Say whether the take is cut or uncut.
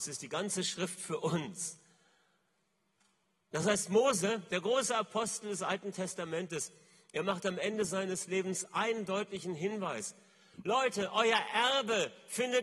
uncut